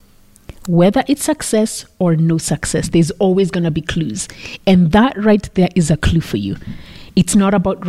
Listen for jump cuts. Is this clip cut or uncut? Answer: uncut